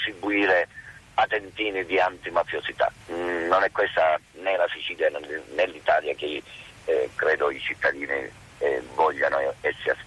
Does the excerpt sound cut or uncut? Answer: cut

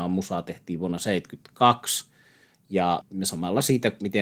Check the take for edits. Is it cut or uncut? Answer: uncut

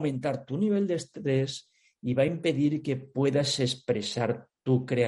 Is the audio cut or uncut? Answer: uncut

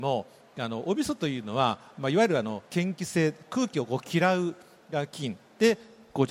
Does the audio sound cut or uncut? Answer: cut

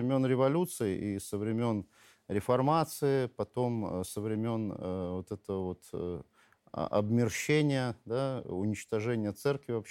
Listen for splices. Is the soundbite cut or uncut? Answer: uncut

